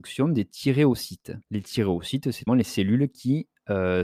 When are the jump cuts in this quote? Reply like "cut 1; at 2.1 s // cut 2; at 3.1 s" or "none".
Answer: cut 1; at 1.4 s // cut 2; at 2.5 s